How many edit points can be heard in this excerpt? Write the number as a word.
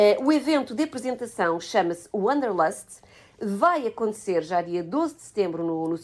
zero